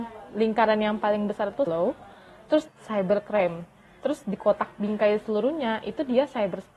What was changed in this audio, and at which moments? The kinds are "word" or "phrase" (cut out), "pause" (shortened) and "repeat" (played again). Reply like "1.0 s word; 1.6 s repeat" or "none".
1.7 s word; 2.7 s phrase

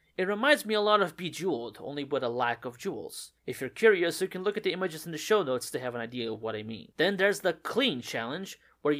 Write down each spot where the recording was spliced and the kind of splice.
3.4 s pause; 6.9 s pause

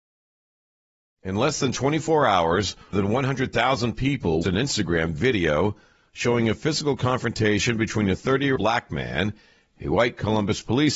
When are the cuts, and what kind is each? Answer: 2.9 s word; 4.4 s word; 8.6 s word

